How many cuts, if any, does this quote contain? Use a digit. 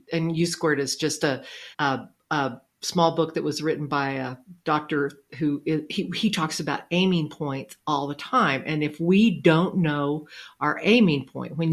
1